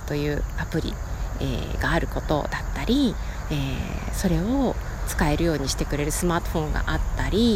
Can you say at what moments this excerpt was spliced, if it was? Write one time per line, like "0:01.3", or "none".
none